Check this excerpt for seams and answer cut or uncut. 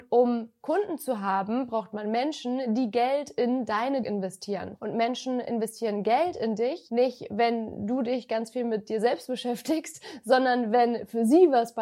cut